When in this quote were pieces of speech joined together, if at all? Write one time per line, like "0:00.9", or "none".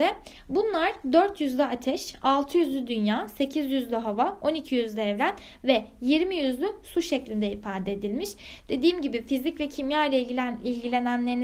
none